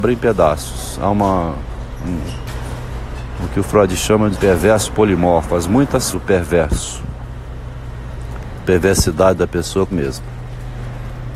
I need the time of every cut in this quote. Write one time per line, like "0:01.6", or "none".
0:04.3
0:06.1
0:08.6
0:09.9